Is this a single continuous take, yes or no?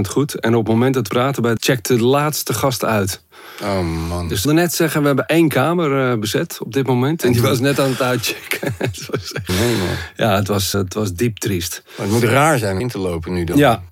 no